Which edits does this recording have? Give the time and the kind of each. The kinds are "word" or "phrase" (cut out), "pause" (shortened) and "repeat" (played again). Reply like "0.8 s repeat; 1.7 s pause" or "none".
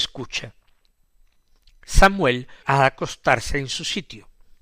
2.6 s word